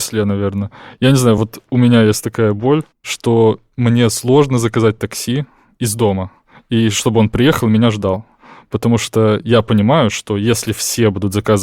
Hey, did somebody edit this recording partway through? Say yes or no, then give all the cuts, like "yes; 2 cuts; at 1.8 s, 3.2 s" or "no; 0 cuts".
no; 0 cuts